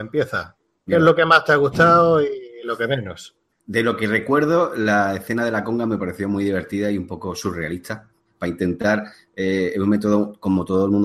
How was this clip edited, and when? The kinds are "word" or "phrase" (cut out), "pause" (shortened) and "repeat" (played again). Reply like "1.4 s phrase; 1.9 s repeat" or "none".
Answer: none